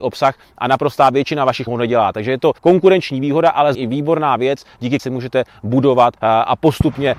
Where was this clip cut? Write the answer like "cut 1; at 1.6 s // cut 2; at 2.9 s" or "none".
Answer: cut 1; at 1.7 s // cut 2; at 2.6 s // cut 3; at 3.7 s // cut 4; at 5.0 s // cut 5; at 6.2 s